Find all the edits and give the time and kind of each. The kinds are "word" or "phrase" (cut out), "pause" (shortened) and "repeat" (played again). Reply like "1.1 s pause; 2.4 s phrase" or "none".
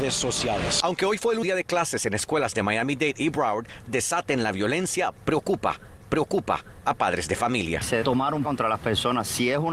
1.4 s word; 3.9 s phrase; 6.0 s repeat; 8.0 s word; 8.4 s phrase